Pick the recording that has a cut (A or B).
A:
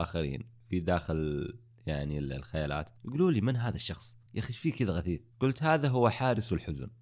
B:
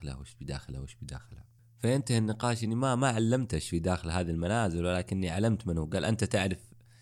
A